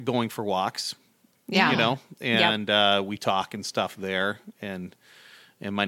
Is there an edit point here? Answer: no; 0 cuts

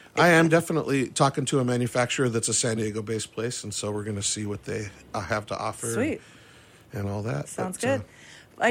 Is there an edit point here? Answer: no; 0 cuts

